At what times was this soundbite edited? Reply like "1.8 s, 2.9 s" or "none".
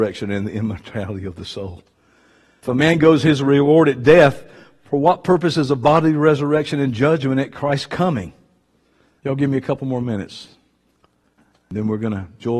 none